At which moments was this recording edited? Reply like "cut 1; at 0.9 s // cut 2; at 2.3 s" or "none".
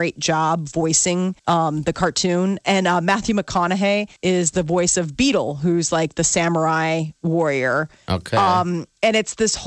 cut 1; at 1.4 s // cut 2; at 4.2 s